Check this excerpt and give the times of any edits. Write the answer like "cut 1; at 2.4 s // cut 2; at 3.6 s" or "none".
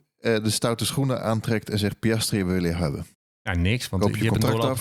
cut 1; at 3.1 s